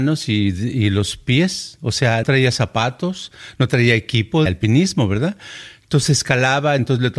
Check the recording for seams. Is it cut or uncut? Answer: cut